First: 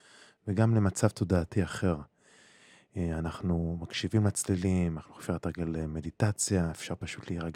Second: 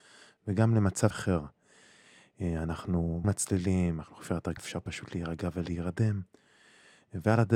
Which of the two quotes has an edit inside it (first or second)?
second